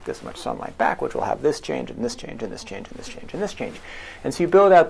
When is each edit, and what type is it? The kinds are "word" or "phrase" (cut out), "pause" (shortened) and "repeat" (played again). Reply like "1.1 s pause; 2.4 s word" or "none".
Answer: none